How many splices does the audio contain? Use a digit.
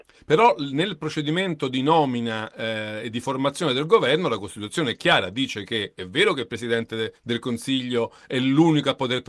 1